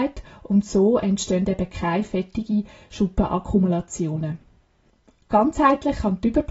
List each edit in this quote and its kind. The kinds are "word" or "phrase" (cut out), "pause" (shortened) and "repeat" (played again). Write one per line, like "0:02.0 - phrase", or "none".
none